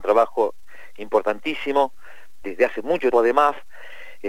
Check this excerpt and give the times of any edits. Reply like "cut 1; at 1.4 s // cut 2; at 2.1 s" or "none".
cut 1; at 2.4 s // cut 2; at 3.1 s